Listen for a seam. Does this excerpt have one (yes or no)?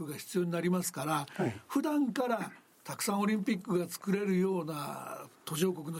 no